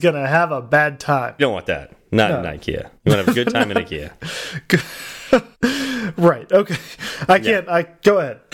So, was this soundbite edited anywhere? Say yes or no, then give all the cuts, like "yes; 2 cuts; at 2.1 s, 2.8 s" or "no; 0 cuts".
yes; 3 cuts; at 1.4 s, 3.0 s, 5.5 s